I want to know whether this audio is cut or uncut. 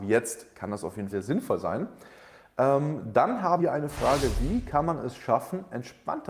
cut